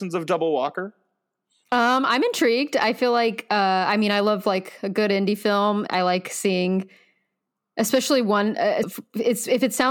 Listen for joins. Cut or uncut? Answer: cut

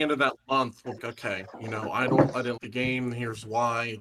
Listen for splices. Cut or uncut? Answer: cut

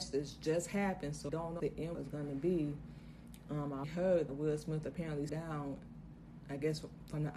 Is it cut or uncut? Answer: cut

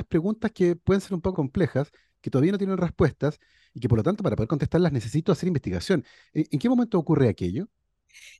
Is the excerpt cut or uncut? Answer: cut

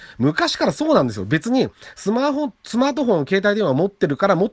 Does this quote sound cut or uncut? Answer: uncut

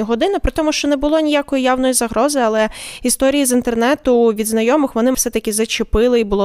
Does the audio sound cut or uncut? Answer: cut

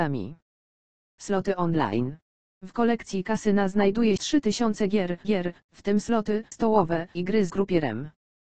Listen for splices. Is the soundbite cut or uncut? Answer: cut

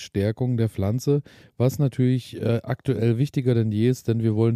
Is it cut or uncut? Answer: uncut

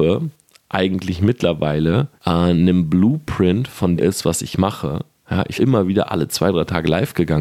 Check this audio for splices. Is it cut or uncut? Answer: cut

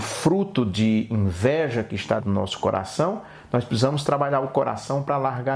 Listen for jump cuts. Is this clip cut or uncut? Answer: cut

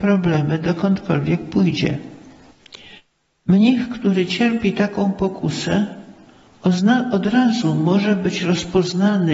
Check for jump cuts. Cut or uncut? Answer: uncut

